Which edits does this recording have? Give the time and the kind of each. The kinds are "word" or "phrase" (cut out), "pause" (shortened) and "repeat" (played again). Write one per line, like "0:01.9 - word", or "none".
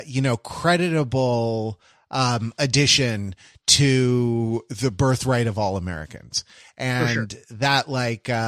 none